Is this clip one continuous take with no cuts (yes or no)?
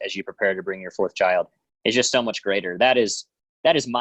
yes